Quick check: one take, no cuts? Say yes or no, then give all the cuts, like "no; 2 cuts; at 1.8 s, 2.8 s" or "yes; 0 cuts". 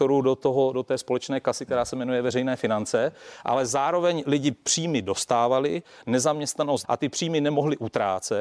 no; 1 cut; at 6.8 s